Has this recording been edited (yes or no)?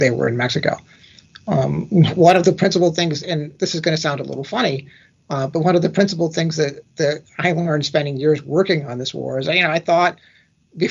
no